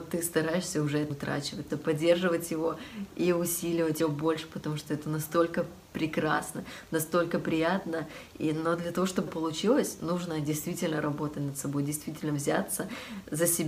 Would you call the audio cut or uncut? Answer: cut